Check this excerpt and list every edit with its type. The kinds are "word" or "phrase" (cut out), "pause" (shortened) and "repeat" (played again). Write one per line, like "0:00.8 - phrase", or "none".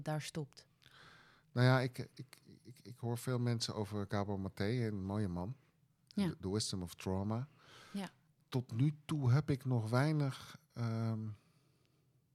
none